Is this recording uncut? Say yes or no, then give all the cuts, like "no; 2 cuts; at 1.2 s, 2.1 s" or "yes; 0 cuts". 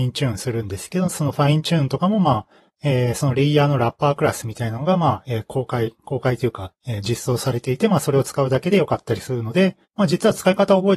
no; 2 cuts; at 2.7 s, 9.8 s